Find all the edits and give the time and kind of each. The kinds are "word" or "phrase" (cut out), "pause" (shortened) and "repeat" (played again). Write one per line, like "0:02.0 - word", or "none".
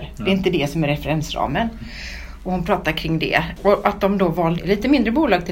0:04.6 - phrase